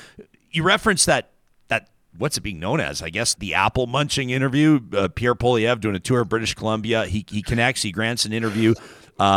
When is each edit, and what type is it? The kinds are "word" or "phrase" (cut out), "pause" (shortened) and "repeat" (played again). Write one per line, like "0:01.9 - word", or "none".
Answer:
0:03.3 - word